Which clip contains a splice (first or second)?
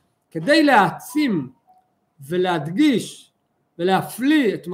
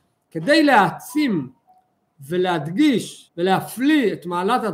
second